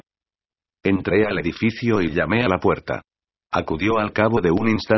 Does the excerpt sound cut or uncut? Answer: uncut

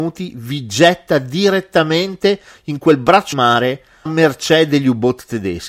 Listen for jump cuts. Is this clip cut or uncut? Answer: cut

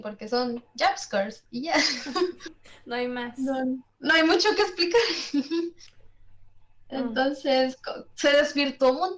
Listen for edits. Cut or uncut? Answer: uncut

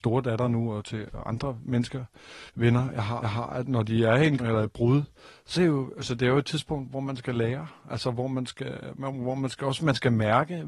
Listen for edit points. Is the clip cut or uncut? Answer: cut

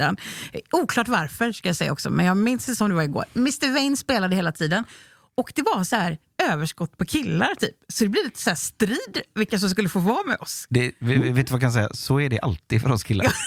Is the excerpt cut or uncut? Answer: uncut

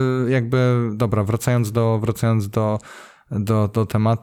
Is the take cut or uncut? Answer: uncut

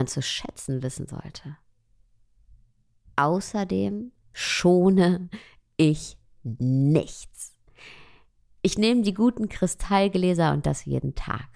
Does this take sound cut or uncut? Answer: cut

